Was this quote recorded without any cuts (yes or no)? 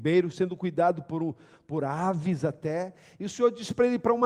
yes